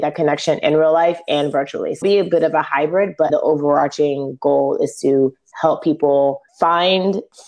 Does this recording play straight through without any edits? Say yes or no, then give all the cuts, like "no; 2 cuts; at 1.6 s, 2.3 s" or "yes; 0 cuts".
no; 3 cuts; at 2.0 s, 3.3 s, 6.5 s